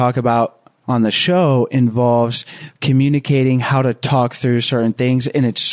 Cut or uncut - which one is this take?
uncut